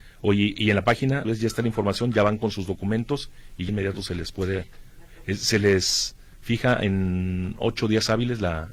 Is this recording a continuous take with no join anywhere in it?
no; 2 cuts; at 1.2 s, 3.7 s

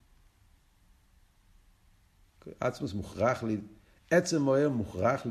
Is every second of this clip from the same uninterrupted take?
yes; 0 cuts

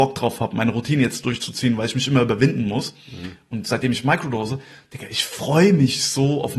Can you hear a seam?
no; 0 cuts

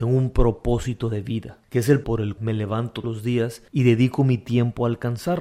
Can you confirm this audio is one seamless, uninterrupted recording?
no; 5 cuts; at 1.6 s, 2.0 s, 2.4 s, 3.0 s, 3.7 s

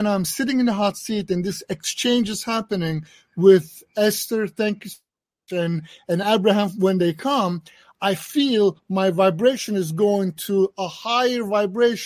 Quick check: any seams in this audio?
no; 0 cuts

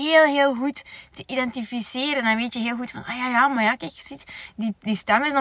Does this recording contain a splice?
no; 0 cuts

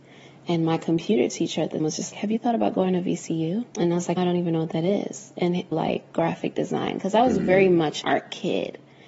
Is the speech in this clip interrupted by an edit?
yes; 6 cuts; at 1.8 s, 2.1 s, 3.7 s, 4.2 s, 5.7 s, 8.0 s

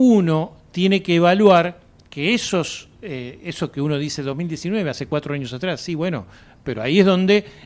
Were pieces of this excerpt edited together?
no; 0 cuts

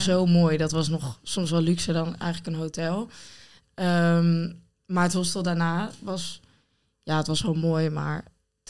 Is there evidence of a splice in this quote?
no; 0 cuts

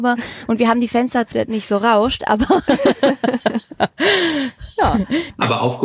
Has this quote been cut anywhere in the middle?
yes; 1 cut; at 1.3 s

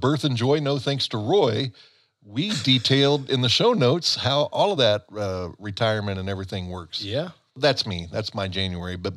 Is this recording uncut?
yes; 0 cuts

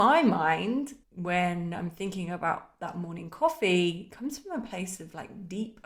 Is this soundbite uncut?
no; 1 cut; at 1.0 s

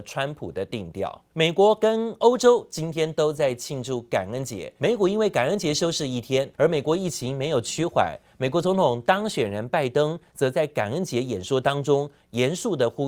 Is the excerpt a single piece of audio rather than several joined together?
no; 3 cuts; at 1.3 s, 4.8 s, 6.5 s

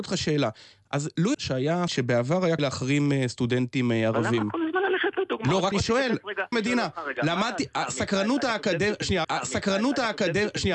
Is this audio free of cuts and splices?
no; 6 cuts; at 1.3 s, 1.9 s, 2.6 s, 5.7 s, 6.5 s, 9.2 s

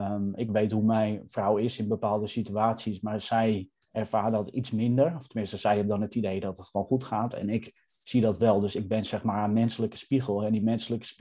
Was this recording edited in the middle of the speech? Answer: yes; 1 cut; at 3.9 s

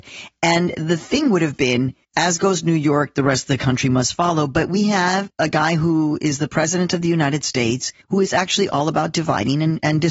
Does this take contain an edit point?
yes; 3 cuts; at 2.0 s, 5.3 s, 8.0 s

